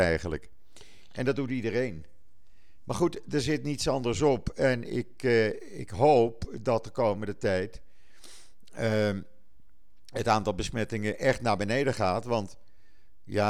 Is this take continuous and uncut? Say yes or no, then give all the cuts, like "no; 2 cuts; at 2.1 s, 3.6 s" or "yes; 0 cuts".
yes; 0 cuts